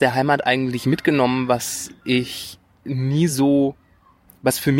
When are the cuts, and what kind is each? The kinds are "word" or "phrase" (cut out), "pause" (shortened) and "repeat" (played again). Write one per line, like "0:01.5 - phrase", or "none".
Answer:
none